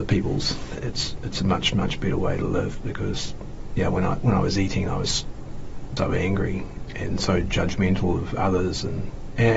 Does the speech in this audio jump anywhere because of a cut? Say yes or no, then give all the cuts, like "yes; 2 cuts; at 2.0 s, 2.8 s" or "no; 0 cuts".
yes; 1 cut; at 6.0 s